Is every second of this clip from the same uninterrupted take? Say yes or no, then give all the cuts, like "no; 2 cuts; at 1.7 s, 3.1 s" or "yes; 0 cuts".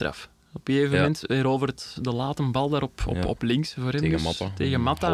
yes; 0 cuts